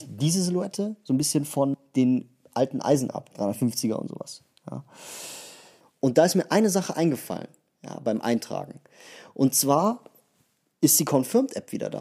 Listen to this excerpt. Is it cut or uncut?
uncut